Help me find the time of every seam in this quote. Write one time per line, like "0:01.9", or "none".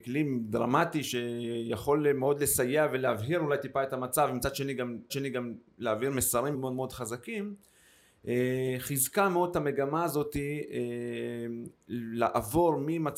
0:05.1
0:06.5